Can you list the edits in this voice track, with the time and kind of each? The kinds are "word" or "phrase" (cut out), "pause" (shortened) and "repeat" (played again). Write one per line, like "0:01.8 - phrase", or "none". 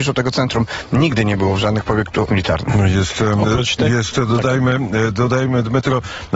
0:02.3 - word